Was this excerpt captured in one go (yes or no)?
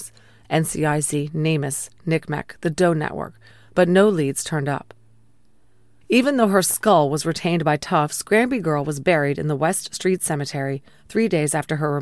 yes